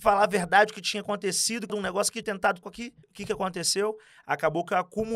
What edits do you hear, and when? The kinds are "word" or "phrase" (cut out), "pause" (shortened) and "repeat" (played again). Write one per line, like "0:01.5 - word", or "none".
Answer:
0:01.7 - phrase
0:02.2 - word
0:02.6 - phrase
0:03.0 - pause

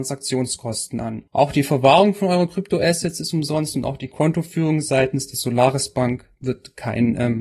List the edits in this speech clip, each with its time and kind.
0:01.3 - pause

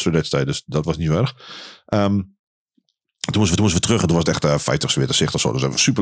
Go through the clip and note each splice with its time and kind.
0:03.6 - repeat

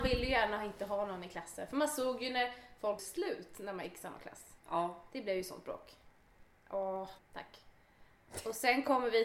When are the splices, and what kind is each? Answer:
0:03.0 - word
0:04.6 - pause
0:07.2 - word

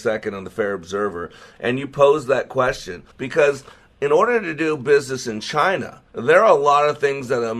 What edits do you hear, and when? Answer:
0:03.1 - pause
0:06.1 - pause

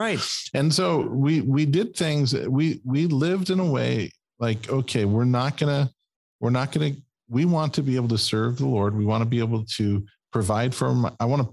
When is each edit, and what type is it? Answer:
none

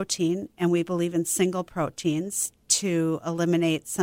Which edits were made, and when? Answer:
none

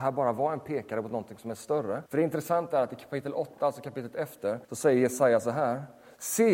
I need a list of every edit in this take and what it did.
0:02.1 - pause
0:04.6 - pause

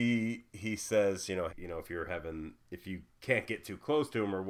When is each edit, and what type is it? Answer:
0:01.5 - word
0:02.6 - pause
0:03.1 - pause

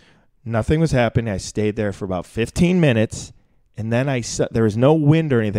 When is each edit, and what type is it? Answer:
none

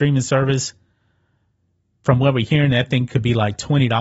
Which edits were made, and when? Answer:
none

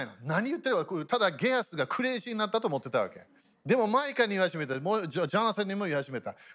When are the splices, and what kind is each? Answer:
0:03.4 - pause

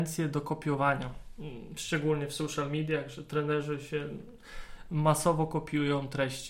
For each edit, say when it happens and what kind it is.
none

